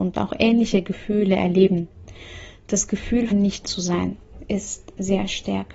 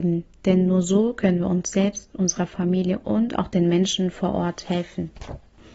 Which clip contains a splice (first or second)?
first